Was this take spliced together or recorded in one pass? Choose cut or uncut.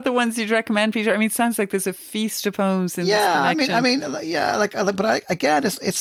uncut